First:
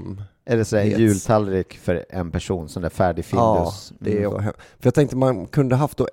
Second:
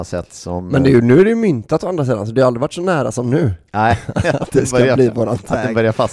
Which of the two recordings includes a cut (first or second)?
first